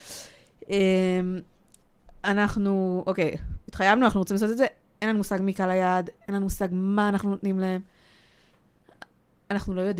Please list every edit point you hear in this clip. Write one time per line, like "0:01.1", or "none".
none